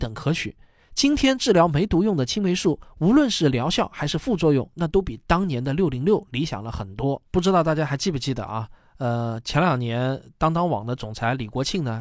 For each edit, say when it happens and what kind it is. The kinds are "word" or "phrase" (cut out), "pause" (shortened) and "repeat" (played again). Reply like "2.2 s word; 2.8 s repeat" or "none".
7.3 s pause

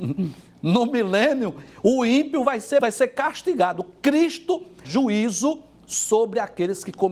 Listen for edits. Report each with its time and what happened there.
2.8 s word; 4.8 s word

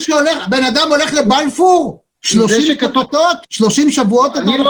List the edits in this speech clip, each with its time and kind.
2.1 s pause; 3.4 s pause

